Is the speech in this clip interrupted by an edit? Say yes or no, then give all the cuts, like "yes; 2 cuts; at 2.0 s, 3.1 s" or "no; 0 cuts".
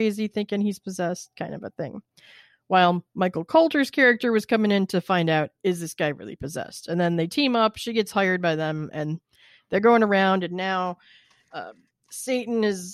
no; 0 cuts